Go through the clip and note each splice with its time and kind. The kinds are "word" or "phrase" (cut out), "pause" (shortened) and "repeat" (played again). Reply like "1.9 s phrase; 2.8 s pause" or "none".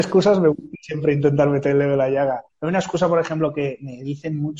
2.5 s pause

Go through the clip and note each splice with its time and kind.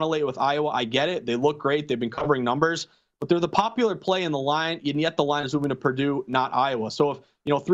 none

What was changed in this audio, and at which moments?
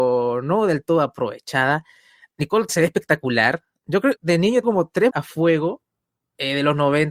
2.7 s word; 4.1 s word; 4.6 s word; 5.1 s word

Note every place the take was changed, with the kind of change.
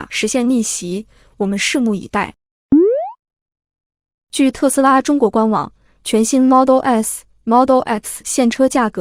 none

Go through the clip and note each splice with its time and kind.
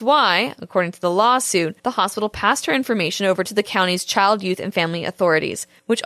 1.8 s pause

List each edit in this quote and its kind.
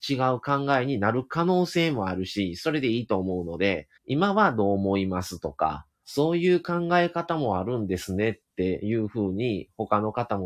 4.0 s pause; 6.0 s word

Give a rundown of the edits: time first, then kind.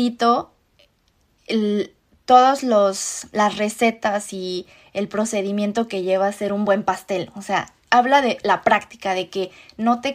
none

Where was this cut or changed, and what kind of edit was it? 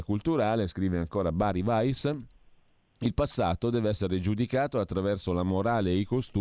none

